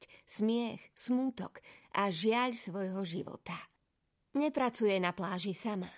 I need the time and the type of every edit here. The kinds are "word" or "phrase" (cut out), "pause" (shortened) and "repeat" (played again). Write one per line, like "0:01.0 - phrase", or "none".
none